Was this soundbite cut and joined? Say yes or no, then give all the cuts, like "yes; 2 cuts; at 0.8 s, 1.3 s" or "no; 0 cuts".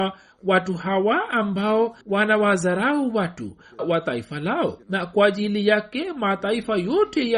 yes; 3 cuts; at 2.0 s, 3.8 s, 4.8 s